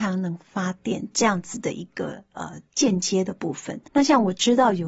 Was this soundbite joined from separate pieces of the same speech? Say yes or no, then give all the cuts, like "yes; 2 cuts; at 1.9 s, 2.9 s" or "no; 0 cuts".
yes; 1 cut; at 3.9 s